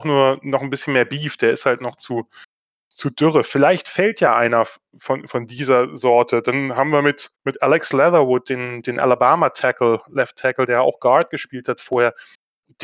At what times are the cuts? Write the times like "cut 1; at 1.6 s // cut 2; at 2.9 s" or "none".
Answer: cut 1; at 7.3 s

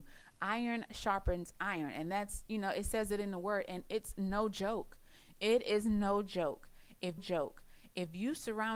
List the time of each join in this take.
cut 1; at 7.2 s

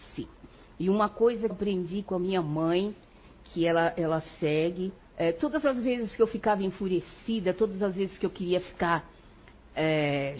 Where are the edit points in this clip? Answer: cut 1; at 1.5 s // cut 2; at 5.0 s

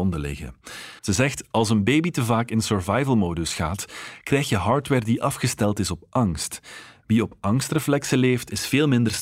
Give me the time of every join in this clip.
cut 1; at 1.0 s

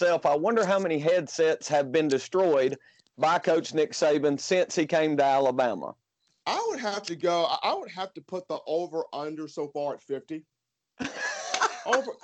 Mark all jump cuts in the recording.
none

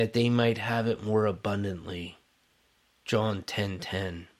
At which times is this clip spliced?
none

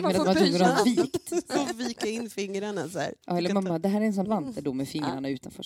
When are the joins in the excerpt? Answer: cut 1; at 3.2 s // cut 2; at 4.2 s

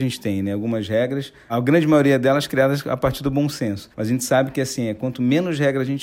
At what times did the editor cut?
cut 1; at 1.5 s // cut 2; at 3.9 s

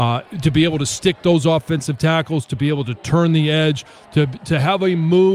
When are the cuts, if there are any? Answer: none

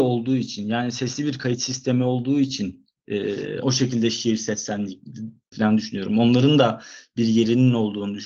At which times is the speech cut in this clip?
cut 1; at 3.6 s // cut 2; at 5.5 s

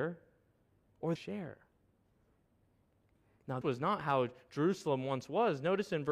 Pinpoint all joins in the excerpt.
cut 1; at 1.2 s // cut 2; at 3.6 s

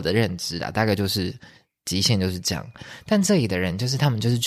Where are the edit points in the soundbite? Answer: none

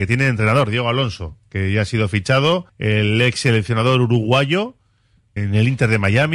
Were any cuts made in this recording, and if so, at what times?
cut 1; at 2.7 s // cut 2; at 5.4 s

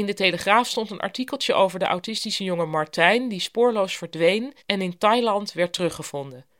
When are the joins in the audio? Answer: cut 1; at 4.6 s

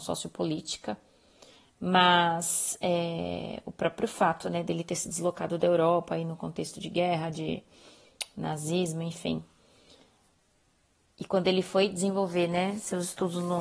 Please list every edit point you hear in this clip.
none

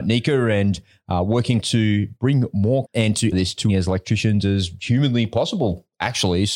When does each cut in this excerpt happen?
cut 1; at 1.6 s // cut 2; at 2.8 s // cut 3; at 3.3 s // cut 4; at 3.7 s

